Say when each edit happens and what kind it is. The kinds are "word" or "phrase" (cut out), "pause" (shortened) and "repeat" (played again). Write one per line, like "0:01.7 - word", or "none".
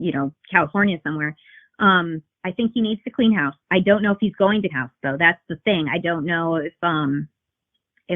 0:02.3 - pause
0:03.6 - pause
0:04.7 - word

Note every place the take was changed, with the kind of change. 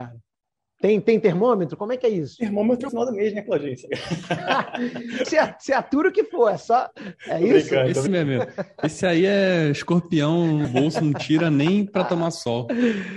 0:02.9 - phrase
0:05.2 - word
0:08.1 - word
0:10.6 - word

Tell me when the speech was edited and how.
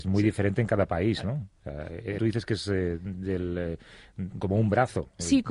0:02.2 - word

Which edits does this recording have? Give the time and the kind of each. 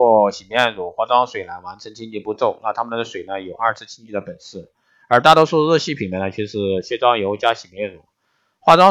none

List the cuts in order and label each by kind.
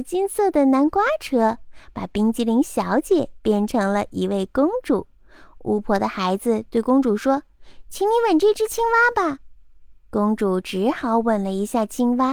0:10.0 - pause

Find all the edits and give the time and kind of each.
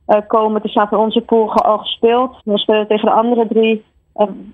0:02.4 - pause

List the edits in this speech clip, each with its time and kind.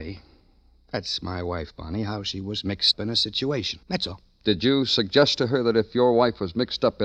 0:02.9 - word
0:03.8 - pause

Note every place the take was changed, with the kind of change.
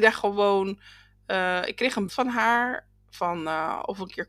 0:02.1 - word

